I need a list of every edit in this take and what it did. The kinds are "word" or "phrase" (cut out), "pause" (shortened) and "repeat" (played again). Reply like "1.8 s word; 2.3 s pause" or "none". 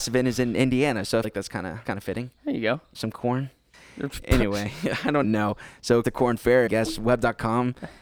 1.2 s word; 1.8 s word; 2.9 s word; 5.2 s word; 6.0 s word; 6.7 s word

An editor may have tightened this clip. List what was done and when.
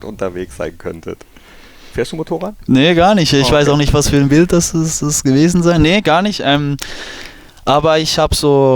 none

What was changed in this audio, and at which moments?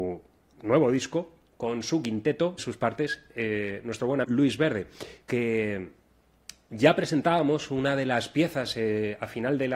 2.6 s phrase; 4.2 s word

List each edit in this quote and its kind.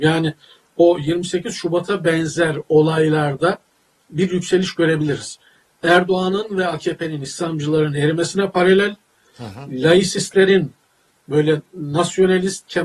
none

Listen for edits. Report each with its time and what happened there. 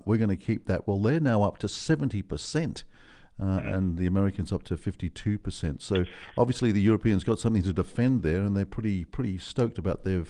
none

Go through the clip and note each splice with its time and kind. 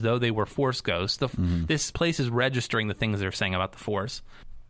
1.9 s word

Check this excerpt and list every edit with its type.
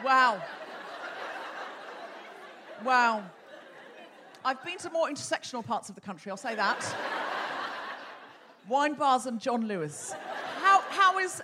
8.6 s pause

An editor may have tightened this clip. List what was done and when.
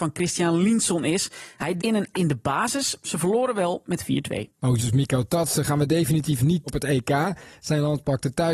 1.8 s word; 2.1 s word; 4.8 s word; 6.7 s word

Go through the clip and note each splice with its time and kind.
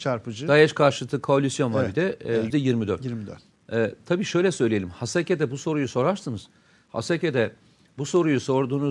2.5 s word

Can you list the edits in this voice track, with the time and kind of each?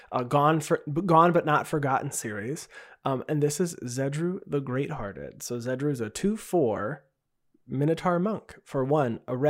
none

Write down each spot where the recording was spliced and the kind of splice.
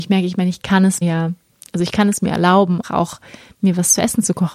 1.0 s word; 2.8 s word

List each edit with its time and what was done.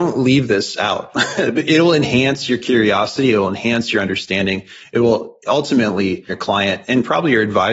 6.3 s word

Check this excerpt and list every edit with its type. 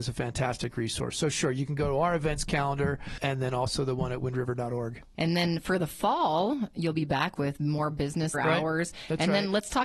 8.3 s word

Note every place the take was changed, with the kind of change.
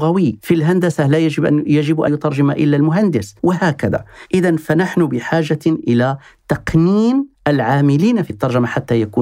2.1 s word; 3.4 s pause; 8.3 s word

